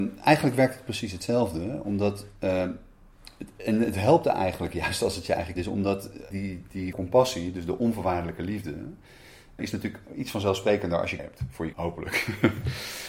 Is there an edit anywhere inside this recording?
yes; 6 cuts; at 5.6 s, 6.3 s, 6.9 s, 9.6 s, 11.2 s, 11.7 s

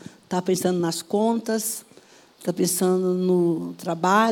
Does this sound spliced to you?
no; 0 cuts

